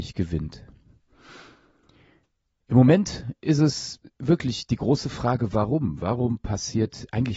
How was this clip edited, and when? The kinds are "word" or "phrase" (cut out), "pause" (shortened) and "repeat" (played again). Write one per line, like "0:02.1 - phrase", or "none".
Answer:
0:04.1 - pause